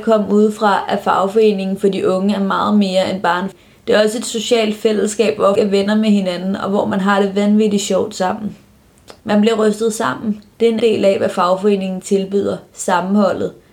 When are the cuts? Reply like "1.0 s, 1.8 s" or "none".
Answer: 3.5 s, 5.5 s, 9.2 s, 10.8 s